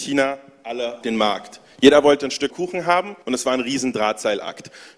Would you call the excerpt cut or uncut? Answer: cut